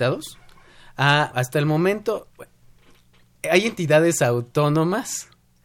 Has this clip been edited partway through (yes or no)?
yes